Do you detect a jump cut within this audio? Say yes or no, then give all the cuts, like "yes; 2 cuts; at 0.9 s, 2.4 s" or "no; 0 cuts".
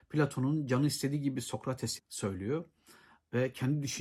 yes; 1 cut; at 2.0 s